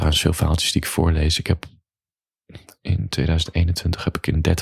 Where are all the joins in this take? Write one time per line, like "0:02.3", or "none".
none

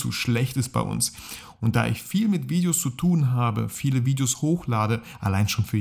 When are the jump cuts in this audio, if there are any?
none

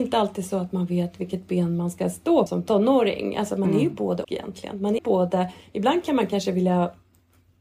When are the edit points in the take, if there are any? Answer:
0:02.5
0:04.2
0:05.0

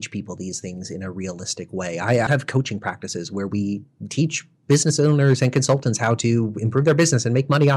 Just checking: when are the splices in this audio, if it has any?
0:02.3

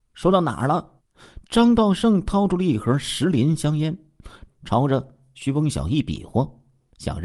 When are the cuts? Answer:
0:01.0
0:04.5

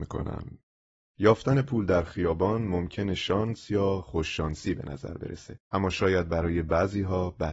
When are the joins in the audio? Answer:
0:05.6

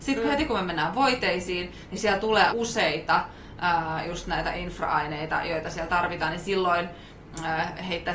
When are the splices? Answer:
0:02.5

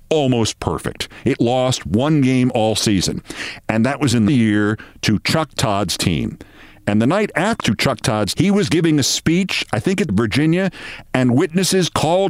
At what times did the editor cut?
0:01.4
0:04.3
0:07.6
0:08.3
0:10.1

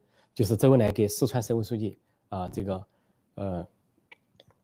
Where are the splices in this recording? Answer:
none

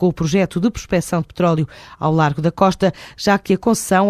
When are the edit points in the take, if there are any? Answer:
none

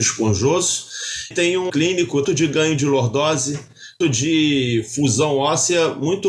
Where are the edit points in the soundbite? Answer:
0:01.3
0:01.7
0:02.2
0:04.0

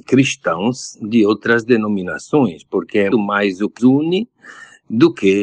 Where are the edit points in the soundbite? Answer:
0:03.1
0:03.8

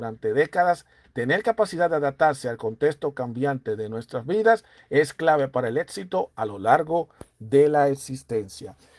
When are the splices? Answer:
none

